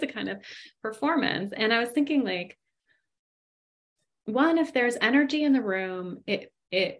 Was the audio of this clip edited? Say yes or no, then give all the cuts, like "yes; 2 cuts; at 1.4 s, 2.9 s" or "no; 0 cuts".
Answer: no; 0 cuts